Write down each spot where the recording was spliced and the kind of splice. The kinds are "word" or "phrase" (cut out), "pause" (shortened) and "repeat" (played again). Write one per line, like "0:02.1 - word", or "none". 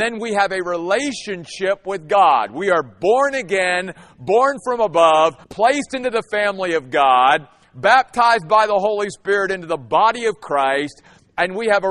0:05.4 - pause

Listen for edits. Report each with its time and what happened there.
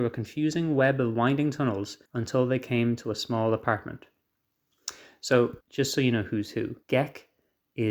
0:02.1 - pause
0:05.6 - pause
0:06.8 - pause

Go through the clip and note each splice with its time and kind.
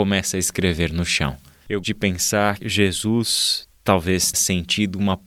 0:01.8 - word
0:02.6 - word
0:04.3 - word

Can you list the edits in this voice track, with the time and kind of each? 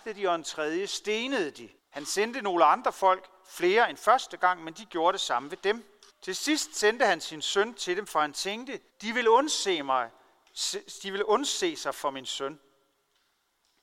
0:01.8 - pause
0:06.1 - pause
0:08.9 - pause

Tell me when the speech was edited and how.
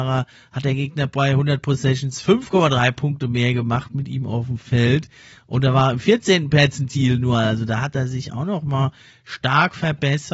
none

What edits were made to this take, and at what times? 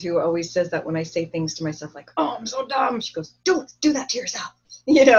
none

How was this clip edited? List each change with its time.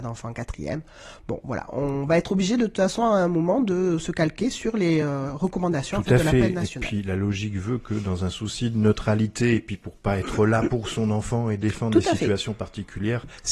none

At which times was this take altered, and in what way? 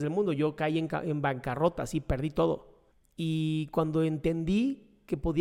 0:02.9 - pause

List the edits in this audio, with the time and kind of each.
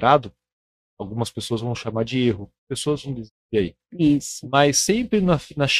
0:02.6 - pause

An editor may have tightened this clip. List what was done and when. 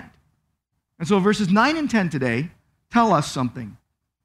none

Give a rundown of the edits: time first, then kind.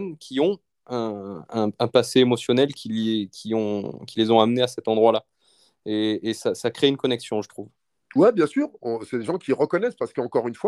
none

